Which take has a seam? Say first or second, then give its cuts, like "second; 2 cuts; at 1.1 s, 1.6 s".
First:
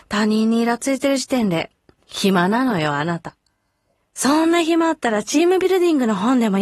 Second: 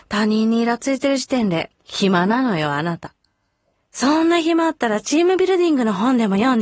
second; 1 cut; at 1.8 s